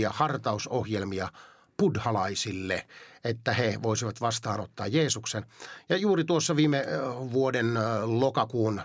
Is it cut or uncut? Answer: uncut